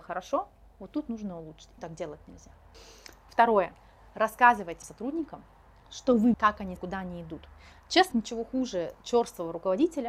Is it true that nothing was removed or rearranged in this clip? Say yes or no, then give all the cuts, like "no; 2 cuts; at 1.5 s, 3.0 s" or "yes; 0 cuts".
no; 6 cuts; at 1.8 s, 4.8 s, 5.8 s, 6.3 s, 6.8 s, 8.1 s